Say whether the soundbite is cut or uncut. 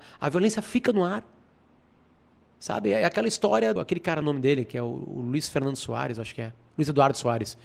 cut